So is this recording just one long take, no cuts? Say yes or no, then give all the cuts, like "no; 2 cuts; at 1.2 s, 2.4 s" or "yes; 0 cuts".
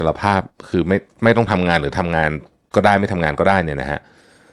yes; 0 cuts